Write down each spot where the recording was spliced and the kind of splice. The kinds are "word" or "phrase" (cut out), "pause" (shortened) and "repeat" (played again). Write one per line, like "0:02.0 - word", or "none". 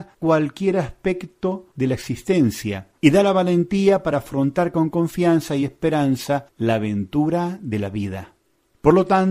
none